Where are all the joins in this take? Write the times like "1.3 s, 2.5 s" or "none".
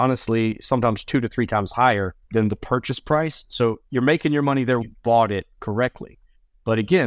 2.2 s, 3.9 s, 4.8 s